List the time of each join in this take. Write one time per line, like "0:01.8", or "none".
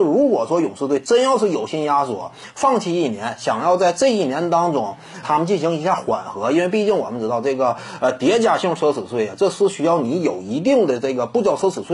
0:05.2